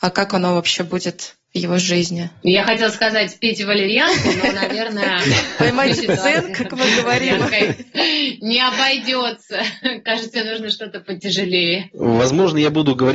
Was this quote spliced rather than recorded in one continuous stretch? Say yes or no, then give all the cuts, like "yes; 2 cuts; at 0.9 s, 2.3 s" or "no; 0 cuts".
no; 0 cuts